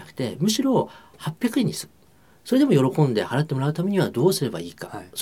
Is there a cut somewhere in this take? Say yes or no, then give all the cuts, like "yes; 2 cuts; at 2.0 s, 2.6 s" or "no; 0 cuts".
no; 0 cuts